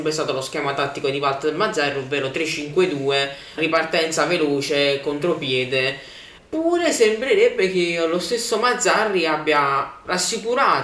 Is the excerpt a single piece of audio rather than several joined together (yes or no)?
no